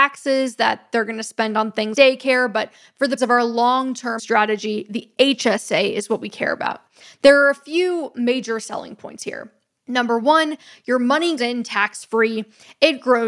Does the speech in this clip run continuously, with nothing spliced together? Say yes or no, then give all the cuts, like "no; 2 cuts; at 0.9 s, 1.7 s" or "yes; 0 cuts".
no; 4 cuts; at 1.9 s, 3.2 s, 4.2 s, 11.4 s